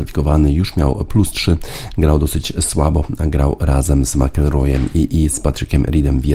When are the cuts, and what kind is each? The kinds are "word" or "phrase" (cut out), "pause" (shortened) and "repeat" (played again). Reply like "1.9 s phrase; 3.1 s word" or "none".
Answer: none